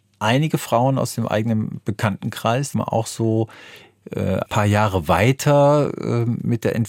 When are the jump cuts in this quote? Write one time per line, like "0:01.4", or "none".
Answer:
0:02.7
0:04.5